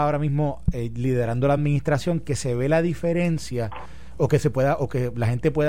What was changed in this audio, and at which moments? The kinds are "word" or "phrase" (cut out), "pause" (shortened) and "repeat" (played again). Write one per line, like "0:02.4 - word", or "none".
none